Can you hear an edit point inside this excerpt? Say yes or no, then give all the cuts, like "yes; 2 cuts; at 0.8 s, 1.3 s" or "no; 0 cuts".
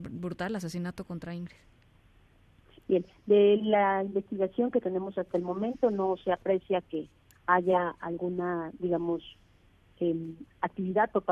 no; 0 cuts